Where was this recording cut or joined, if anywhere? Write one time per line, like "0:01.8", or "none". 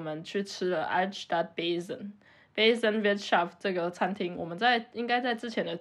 none

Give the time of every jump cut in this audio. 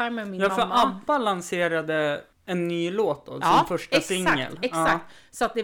0:02.3

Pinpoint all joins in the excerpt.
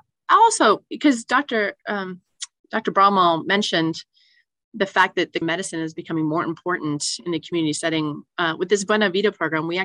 0:05.4

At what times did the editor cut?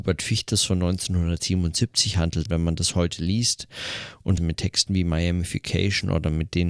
0:02.5
0:04.4

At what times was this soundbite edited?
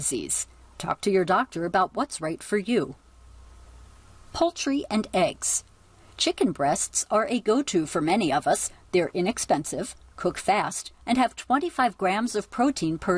none

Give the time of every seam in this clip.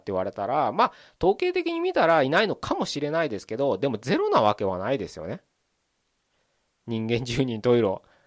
none

